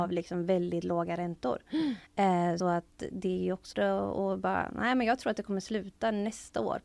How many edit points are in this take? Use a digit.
2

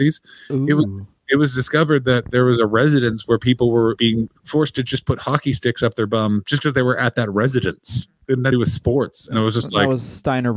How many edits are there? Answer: 3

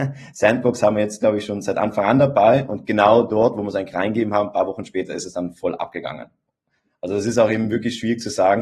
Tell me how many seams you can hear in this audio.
0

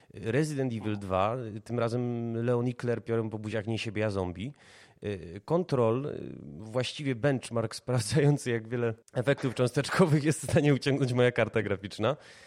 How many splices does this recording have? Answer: 1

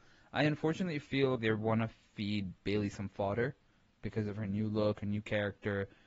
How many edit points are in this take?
1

